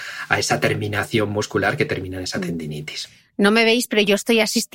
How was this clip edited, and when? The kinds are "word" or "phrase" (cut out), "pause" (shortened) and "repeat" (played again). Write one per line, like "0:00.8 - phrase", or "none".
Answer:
none